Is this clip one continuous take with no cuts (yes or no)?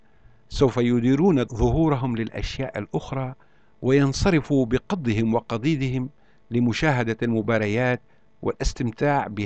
yes